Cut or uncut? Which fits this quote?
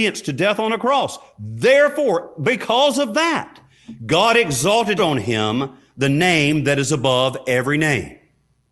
cut